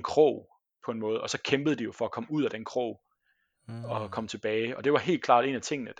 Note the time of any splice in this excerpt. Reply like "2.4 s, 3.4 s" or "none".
none